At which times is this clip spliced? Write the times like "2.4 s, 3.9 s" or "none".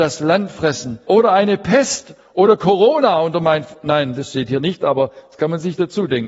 1.0 s

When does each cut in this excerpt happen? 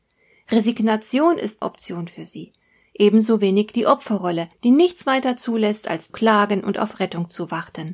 1.6 s, 4.5 s, 6.1 s

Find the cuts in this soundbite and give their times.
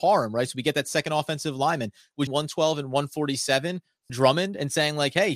2.3 s, 4.1 s

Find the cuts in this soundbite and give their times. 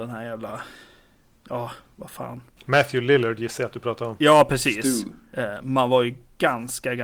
none

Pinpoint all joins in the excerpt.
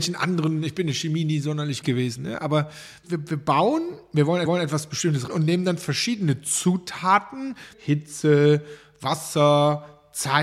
1.8 s, 3.0 s, 4.5 s, 5.3 s, 7.7 s

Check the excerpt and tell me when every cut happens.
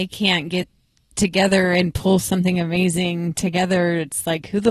none

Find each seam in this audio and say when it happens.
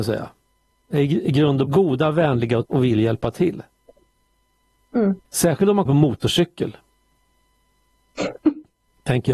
1.7 s, 2.6 s, 5.3 s, 5.9 s

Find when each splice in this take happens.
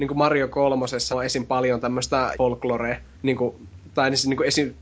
1.1 s, 2.3 s, 3.1 s

